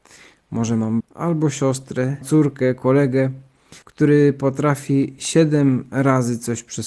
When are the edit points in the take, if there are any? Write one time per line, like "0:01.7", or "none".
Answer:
0:01.0
0:02.2
0:03.8